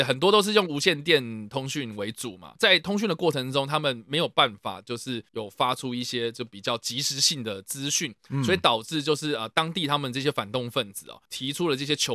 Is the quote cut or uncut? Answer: uncut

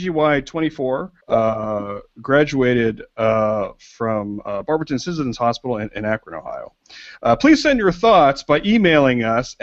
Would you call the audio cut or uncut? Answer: cut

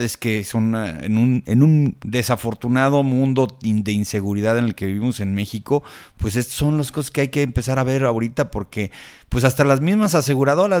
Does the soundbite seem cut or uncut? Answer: uncut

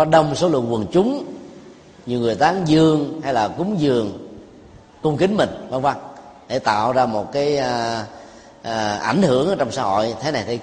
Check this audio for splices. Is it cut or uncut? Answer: uncut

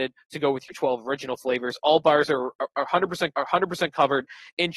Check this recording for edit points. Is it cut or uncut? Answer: cut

